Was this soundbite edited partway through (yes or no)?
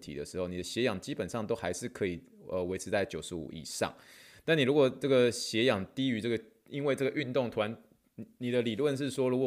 no